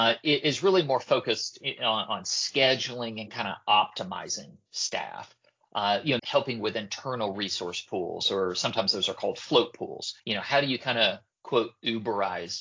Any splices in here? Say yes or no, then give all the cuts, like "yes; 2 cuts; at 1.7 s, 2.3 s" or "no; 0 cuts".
yes; 2 cuts; at 6.2 s, 10.2 s